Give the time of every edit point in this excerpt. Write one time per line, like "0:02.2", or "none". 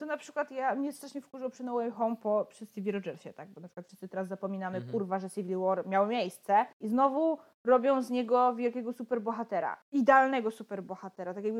0:06.7
0:09.8